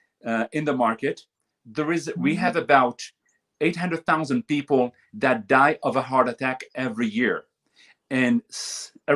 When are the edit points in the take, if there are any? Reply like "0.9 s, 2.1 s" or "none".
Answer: none